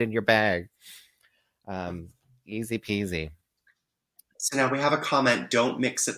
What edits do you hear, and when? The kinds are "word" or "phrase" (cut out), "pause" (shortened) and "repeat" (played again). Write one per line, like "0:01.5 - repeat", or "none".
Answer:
none